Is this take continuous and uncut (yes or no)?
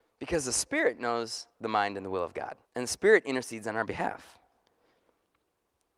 no